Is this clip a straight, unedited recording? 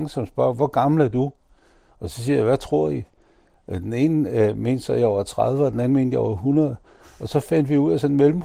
yes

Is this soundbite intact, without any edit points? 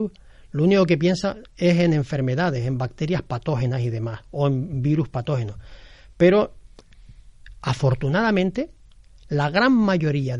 yes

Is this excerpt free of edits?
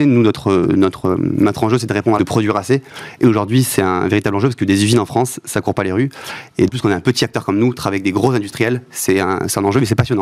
no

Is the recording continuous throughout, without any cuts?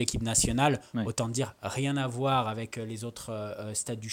yes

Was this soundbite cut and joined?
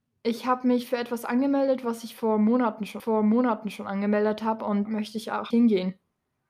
yes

